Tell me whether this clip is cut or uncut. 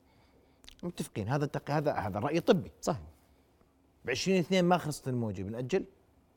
uncut